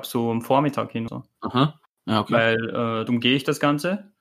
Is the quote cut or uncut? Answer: cut